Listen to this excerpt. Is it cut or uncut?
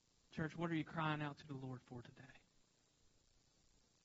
uncut